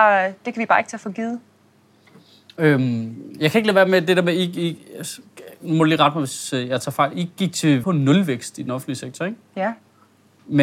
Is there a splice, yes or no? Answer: yes